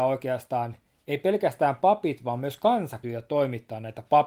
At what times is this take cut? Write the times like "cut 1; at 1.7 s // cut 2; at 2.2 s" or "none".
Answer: cut 1; at 3.0 s